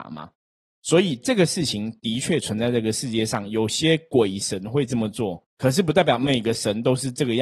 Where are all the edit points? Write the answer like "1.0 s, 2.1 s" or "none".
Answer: 5.5 s